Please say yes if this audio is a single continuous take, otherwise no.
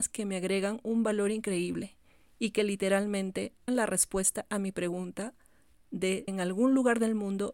no